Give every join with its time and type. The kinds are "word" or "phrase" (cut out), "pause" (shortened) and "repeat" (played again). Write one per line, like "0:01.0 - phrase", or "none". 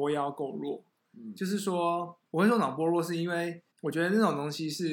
0:02.3 - pause
0:03.7 - pause